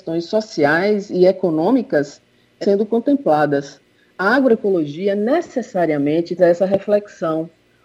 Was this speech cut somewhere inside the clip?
yes; 2 cuts; at 2.6 s, 6.4 s

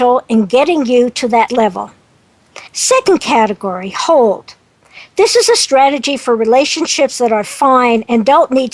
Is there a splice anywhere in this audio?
yes; 2 cuts; at 1.5 s, 2.7 s

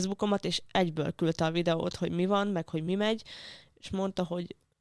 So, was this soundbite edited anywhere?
no; 0 cuts

